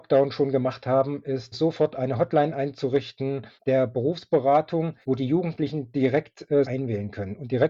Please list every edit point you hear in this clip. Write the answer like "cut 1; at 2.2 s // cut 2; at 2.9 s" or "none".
cut 1; at 1.5 s // cut 2; at 3.6 s // cut 3; at 5.0 s // cut 4; at 6.6 s

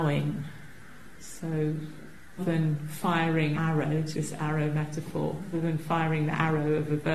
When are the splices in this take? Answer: cut 1; at 2.4 s // cut 2; at 3.5 s // cut 3; at 4.1 s // cut 4; at 5.5 s

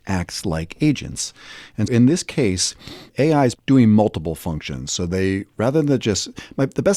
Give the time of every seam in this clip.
cut 1; at 1.9 s // cut 2; at 3.1 s // cut 3; at 3.5 s

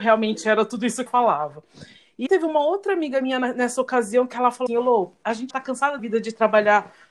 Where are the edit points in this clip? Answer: cut 1; at 1.1 s // cut 2; at 2.3 s // cut 3; at 4.7 s // cut 4; at 5.5 s // cut 5; at 6.0 s

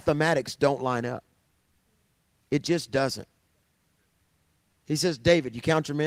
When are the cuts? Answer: none

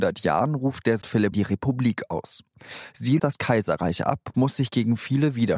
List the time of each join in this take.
cut 1; at 1.0 s // cut 2; at 1.3 s // cut 3; at 3.2 s // cut 4; at 4.3 s

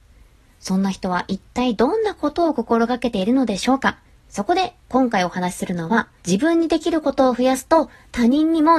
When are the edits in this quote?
cut 1; at 4.0 s // cut 2; at 6.2 s

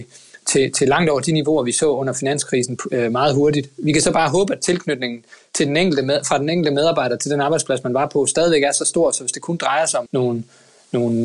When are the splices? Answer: cut 1; at 10.1 s

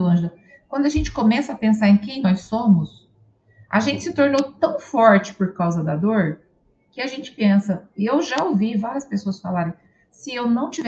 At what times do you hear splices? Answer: none

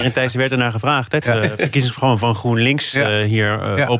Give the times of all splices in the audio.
cut 1; at 1.2 s

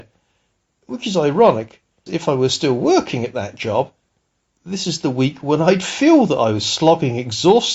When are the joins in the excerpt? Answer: cut 1; at 2.1 s

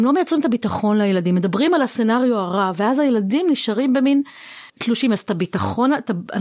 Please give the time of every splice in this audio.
cut 1; at 4.7 s

